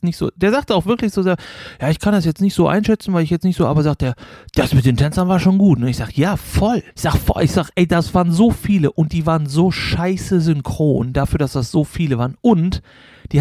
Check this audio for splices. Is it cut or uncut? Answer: cut